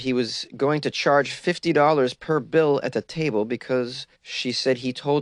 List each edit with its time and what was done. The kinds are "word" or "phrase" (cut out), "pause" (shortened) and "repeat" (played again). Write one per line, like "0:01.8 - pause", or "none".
0:04.1 - pause